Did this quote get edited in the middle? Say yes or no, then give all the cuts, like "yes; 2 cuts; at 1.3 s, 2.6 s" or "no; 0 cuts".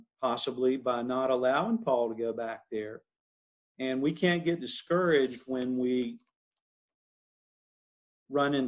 no; 0 cuts